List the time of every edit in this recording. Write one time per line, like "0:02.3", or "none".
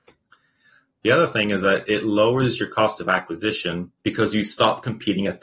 0:04.0